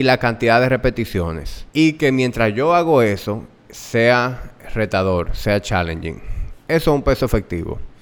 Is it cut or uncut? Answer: cut